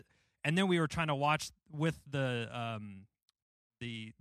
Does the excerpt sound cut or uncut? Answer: uncut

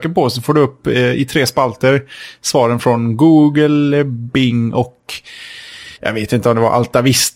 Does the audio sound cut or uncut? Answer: cut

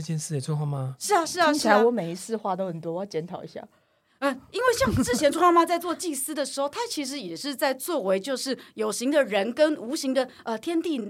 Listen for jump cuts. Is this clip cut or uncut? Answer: uncut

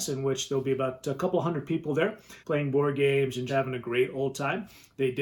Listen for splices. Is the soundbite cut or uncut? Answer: cut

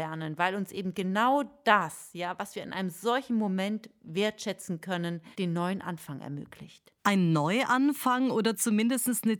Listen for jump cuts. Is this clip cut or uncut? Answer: cut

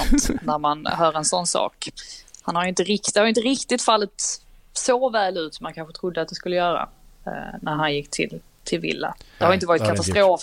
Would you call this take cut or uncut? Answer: uncut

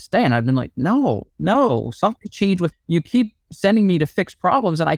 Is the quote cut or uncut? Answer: cut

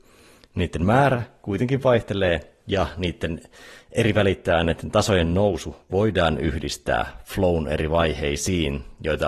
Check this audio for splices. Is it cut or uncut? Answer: uncut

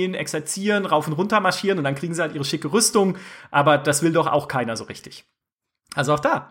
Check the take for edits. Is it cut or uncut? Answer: uncut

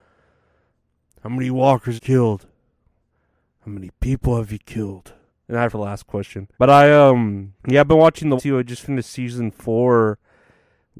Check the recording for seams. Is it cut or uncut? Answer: cut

